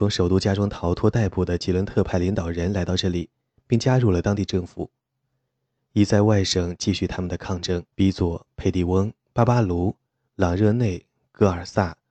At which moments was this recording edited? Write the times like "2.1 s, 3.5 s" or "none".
7.9 s